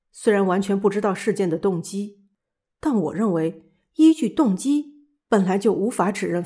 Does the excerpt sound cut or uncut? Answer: uncut